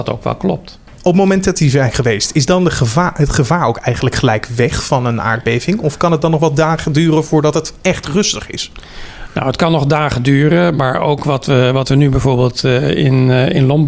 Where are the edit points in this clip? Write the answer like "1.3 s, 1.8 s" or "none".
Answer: none